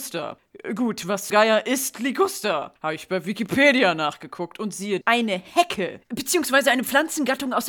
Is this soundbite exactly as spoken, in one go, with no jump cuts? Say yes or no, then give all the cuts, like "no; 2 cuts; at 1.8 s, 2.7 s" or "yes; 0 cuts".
no; 2 cuts; at 1.3 s, 5.0 s